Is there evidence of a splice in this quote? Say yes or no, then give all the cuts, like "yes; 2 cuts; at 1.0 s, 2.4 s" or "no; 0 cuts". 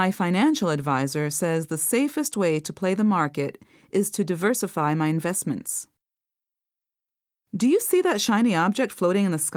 no; 0 cuts